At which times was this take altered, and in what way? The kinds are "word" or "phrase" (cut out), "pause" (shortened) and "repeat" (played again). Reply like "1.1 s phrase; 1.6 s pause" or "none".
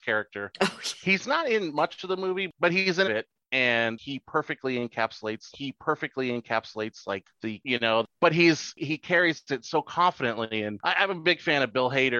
3.0 s phrase; 5.5 s repeat; 7.6 s phrase